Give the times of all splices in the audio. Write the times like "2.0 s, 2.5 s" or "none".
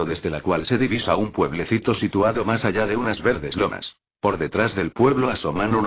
none